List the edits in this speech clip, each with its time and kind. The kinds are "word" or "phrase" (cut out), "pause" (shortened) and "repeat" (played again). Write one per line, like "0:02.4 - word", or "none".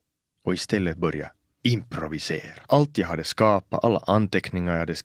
0:02.6 - pause